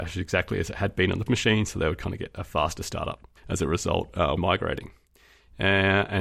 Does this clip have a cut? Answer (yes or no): yes